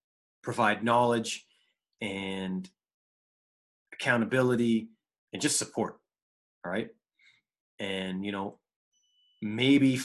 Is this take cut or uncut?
uncut